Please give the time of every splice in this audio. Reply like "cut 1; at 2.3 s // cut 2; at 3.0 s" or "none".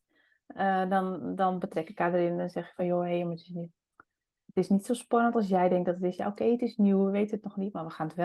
none